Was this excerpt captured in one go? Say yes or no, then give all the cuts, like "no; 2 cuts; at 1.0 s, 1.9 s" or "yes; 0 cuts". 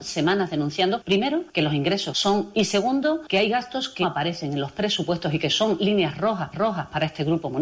no; 3 cuts; at 2.5 s, 4.0 s, 6.5 s